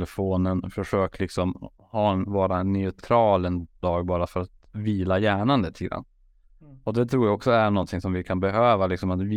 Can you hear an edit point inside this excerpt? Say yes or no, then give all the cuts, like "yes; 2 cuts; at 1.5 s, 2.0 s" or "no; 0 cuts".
no; 0 cuts